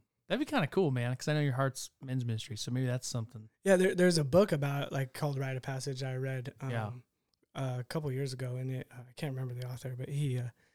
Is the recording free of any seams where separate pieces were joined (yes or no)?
yes